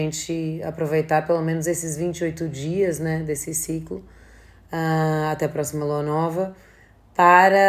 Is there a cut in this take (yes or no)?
no